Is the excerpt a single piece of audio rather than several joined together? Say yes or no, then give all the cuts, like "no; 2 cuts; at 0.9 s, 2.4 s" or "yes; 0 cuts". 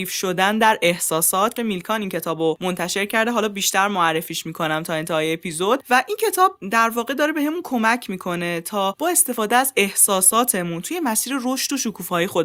no; 1 cut; at 1.6 s